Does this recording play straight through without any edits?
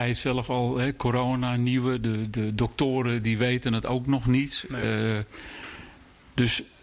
yes; 0 cuts

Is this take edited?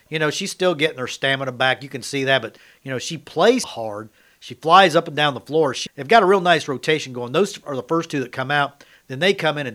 yes; 2 cuts; at 3.6 s, 5.9 s

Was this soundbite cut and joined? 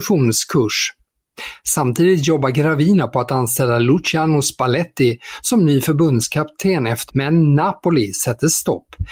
yes; 1 cut; at 7.1 s

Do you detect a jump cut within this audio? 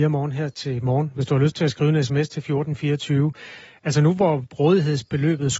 no; 0 cuts

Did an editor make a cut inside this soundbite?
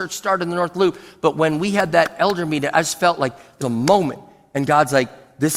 yes; 1 cut; at 3.6 s

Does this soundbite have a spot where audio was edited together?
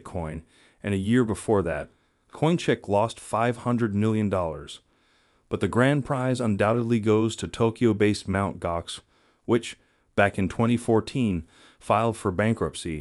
no; 0 cuts

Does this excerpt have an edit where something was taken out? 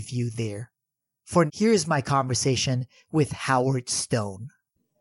yes; 1 cut; at 1.5 s

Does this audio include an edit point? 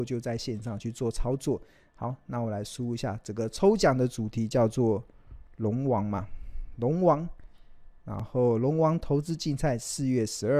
no; 0 cuts

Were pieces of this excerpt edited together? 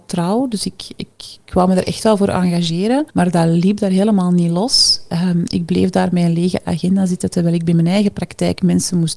yes; 1 cut; at 3.1 s

